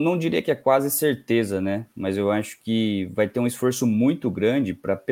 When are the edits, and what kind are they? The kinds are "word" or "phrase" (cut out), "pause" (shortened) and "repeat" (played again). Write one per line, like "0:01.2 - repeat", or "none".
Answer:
none

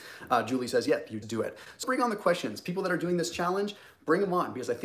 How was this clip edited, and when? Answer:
0:01.2 - word
0:01.8 - word

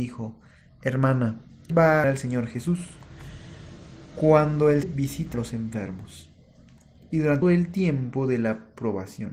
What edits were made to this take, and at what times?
0:01.7 - word
0:02.0 - word
0:04.8 - word
0:05.3 - word
0:07.4 - word

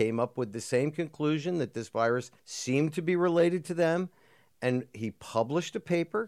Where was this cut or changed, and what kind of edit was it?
0:02.4 - pause

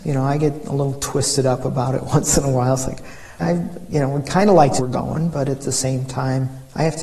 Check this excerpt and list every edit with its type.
0:03.4 - word
0:04.8 - phrase

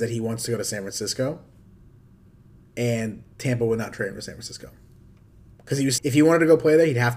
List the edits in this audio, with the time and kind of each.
0:06.0 - word

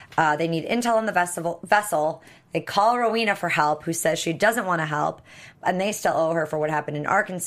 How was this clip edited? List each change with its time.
0:05.5 - pause

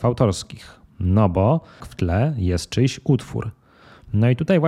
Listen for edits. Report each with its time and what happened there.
0:01.8 - word

